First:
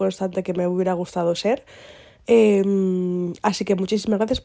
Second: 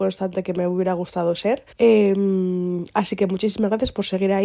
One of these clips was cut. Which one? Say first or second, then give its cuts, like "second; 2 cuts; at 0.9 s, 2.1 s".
second; 1 cut; at 1.7 s